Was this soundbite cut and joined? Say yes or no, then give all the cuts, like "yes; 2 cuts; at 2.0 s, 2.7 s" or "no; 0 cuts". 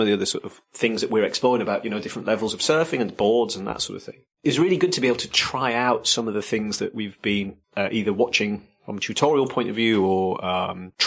yes; 1 cut; at 7.6 s